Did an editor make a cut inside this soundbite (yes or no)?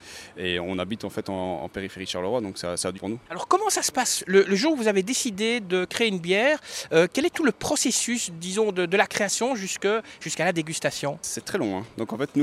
yes